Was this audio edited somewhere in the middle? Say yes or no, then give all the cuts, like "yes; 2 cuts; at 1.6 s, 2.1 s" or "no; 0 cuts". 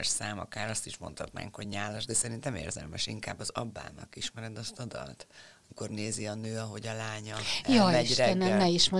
no; 0 cuts